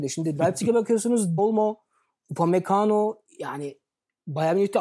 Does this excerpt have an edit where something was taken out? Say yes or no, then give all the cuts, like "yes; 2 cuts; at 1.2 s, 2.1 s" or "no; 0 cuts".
yes; 1 cut; at 1.4 s